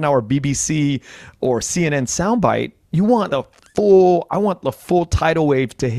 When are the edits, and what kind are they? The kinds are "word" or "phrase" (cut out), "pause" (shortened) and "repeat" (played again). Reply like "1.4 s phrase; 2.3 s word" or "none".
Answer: 3.3 s word